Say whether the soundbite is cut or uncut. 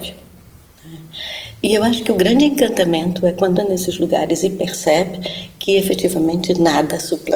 cut